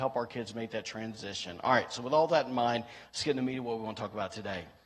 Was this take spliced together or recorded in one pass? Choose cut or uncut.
uncut